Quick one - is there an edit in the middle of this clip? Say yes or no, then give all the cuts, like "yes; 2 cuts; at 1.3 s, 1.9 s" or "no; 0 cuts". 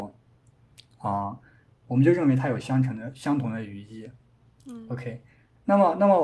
no; 0 cuts